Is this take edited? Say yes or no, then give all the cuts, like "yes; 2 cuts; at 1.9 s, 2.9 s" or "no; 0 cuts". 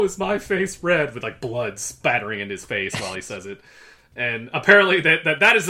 no; 0 cuts